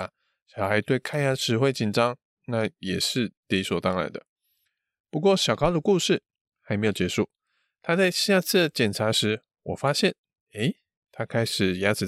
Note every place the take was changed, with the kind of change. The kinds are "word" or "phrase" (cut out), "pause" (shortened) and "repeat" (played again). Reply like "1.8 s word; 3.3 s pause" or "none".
none